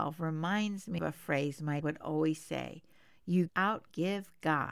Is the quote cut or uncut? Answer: cut